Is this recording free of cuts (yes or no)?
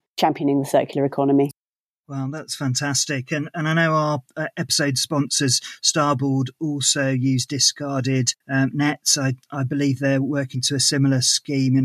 no